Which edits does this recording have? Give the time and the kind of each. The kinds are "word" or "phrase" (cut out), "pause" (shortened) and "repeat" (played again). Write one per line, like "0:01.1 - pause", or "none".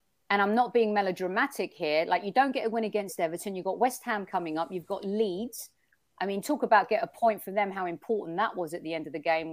none